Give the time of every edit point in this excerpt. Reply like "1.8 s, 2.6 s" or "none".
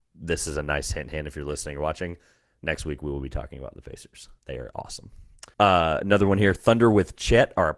4.4 s, 5.5 s